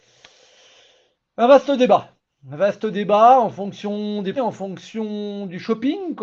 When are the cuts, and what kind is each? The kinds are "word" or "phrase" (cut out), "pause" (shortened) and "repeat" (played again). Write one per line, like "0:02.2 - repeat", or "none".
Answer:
0:04.4 - word

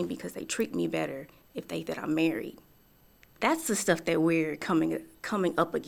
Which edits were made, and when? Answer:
0:01.8 - word
0:03.4 - word

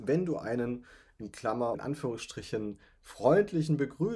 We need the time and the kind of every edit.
0:01.7 - word

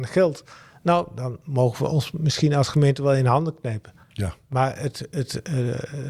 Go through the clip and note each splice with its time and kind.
0:04.0 - pause

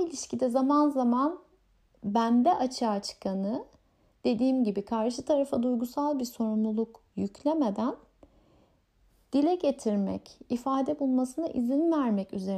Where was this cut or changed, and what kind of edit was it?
none

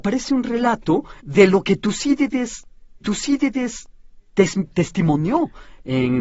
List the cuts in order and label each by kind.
0:01.2 - pause
0:03.0 - repeat

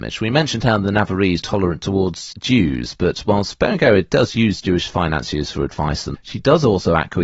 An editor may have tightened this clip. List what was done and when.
0:01.4 - phrase
0:02.3 - word
0:06.1 - word

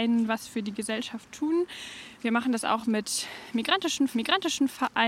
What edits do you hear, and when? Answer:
0:04.1 - repeat

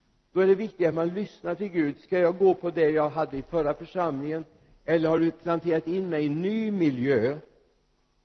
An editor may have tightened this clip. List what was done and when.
none

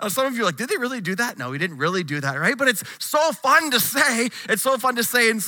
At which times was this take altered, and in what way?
none

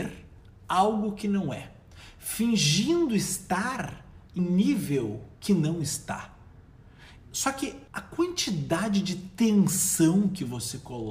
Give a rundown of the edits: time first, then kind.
0:04.4 - word
0:05.3 - pause
0:07.9 - pause

